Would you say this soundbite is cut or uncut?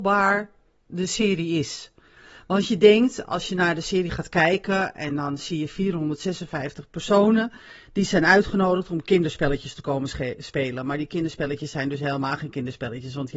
uncut